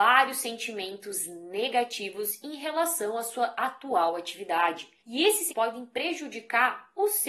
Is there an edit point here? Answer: yes; 2 cuts; at 5.0 s, 5.5 s

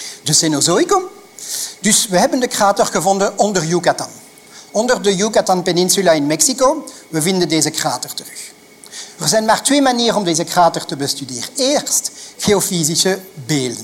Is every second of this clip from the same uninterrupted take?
yes; 0 cuts

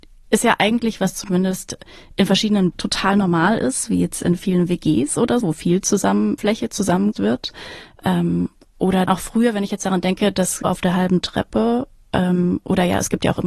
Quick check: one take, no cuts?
no; 7 cuts; at 1.0 s, 2.7 s, 5.4 s, 6.4 s, 7.1 s, 9.1 s, 10.6 s

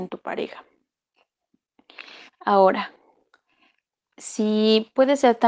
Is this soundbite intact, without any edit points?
yes; 0 cuts

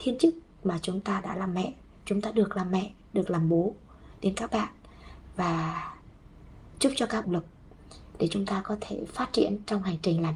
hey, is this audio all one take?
no; 1 cut; at 7.2 s

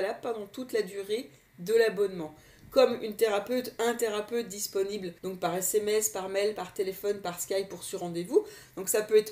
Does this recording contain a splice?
yes; 1 cut; at 5.2 s

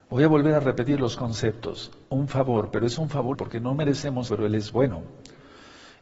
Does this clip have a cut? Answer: yes; 3 cuts; at 2.0 s, 3.3 s, 4.3 s

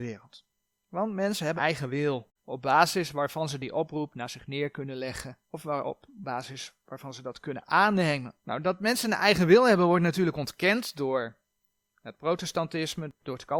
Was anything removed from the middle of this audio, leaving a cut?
yes; 4 cuts; at 1.6 s, 2.4 s, 5.4 s, 8.4 s

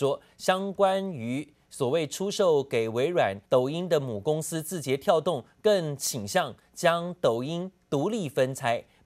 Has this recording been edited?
yes; 1 cut; at 3.4 s

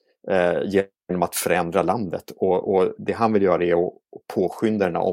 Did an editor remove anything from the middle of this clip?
no; 0 cuts

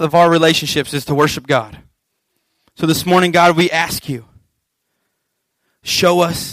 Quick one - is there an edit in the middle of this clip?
no; 0 cuts

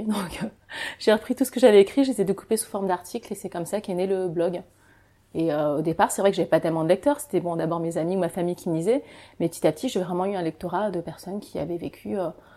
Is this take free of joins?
yes; 0 cuts

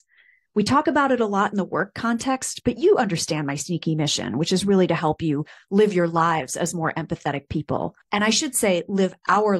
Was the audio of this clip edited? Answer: yes; 1 cut; at 8.0 s

